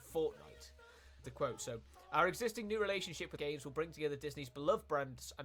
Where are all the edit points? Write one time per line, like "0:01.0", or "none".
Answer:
0:01.2
0:03.4